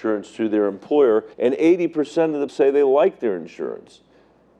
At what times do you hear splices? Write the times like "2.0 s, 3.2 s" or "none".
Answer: 1.3 s, 2.5 s